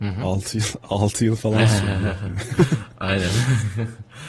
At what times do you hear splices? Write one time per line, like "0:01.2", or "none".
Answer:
none